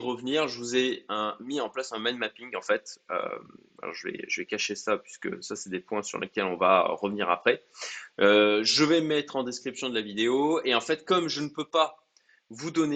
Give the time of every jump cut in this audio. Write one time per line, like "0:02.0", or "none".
none